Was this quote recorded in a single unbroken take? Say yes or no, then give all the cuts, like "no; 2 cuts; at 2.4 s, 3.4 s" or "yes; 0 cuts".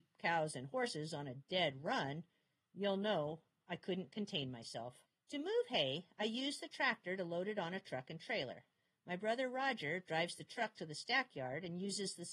no; 1 cut; at 5.1 s